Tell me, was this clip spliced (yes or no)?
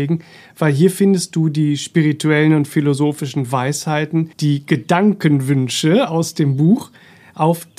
yes